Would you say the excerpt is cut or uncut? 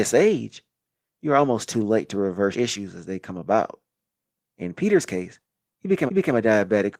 cut